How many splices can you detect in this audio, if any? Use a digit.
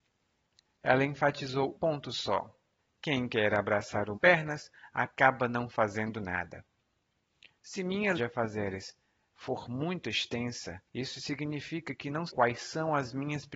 6